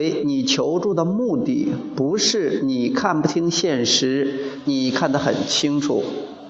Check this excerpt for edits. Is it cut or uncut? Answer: cut